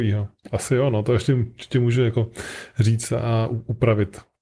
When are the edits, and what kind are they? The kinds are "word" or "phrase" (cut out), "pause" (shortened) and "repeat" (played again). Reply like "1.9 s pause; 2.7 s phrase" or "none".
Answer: none